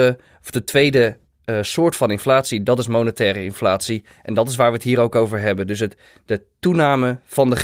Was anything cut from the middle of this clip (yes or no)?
no